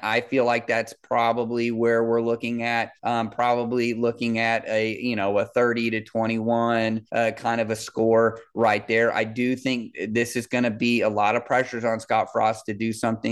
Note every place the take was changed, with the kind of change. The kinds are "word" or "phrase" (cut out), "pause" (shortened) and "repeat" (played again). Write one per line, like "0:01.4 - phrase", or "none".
0:03.0 - pause
0:07.1 - pause